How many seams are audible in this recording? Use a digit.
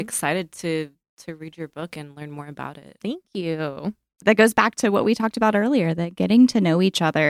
0